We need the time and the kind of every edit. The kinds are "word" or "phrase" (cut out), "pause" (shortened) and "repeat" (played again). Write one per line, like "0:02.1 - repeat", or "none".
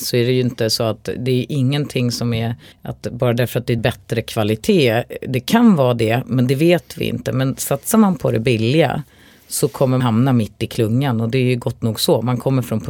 0:02.7 - pause
0:03.8 - phrase
0:10.0 - word